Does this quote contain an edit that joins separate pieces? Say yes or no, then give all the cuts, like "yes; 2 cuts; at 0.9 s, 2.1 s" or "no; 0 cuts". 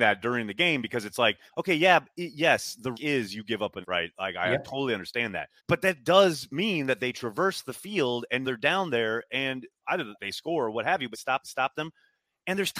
yes; 8 cuts; at 1.5 s, 2.9 s, 3.8 s, 5.6 s, 8.4 s, 10.1 s, 11.1 s, 11.4 s